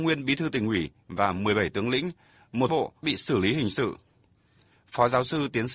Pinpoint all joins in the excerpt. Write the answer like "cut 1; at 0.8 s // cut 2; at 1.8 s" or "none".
cut 1; at 2.7 s // cut 2; at 3.0 s